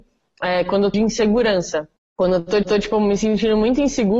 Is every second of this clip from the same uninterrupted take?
no; 2 cuts; at 0.9 s, 2.6 s

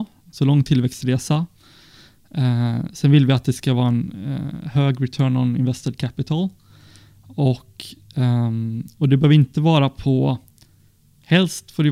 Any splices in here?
no; 0 cuts

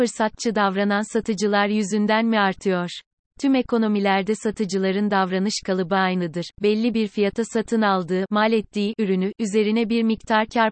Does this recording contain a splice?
no; 0 cuts

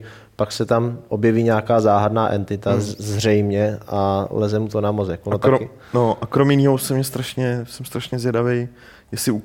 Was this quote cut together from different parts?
no; 0 cuts

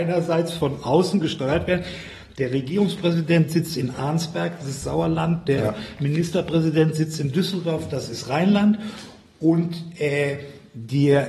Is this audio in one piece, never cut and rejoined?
yes; 0 cuts

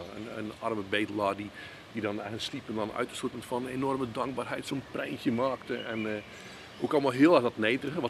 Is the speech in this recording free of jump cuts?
yes; 0 cuts

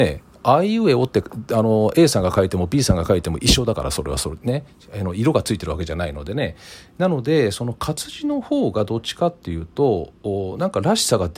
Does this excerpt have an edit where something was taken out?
no; 0 cuts

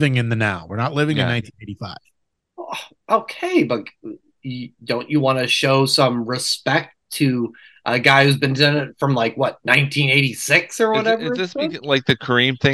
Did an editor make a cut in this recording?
no; 0 cuts

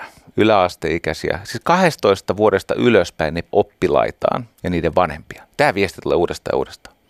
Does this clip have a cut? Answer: yes; 3 cuts; at 3.5 s, 4.5 s, 5.5 s

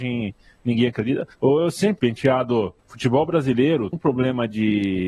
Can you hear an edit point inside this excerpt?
yes; 4 cuts; at 1.3 s, 2.0 s, 2.8 s, 3.9 s

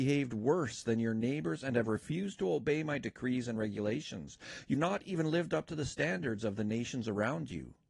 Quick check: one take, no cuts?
no; 1 cut; at 4.7 s

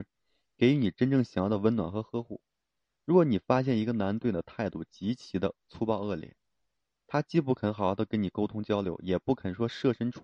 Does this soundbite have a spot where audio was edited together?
no; 0 cuts

